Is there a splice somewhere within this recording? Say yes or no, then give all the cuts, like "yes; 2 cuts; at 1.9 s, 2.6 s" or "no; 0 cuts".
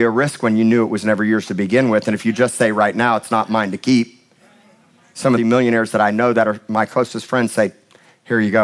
yes; 1 cut; at 5.4 s